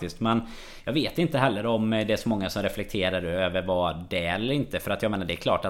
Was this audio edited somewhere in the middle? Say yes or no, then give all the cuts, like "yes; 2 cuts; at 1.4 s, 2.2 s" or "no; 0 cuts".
no; 0 cuts